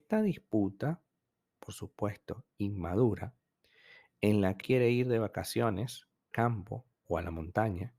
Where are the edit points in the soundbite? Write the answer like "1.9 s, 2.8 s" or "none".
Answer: 4.6 s, 6.3 s